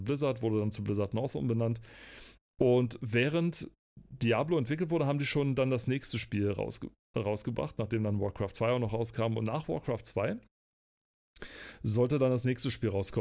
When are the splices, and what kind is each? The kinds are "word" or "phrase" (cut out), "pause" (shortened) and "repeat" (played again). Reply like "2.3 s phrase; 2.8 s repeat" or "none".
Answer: none